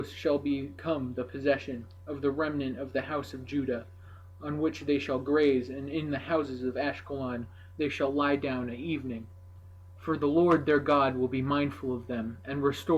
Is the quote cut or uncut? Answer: uncut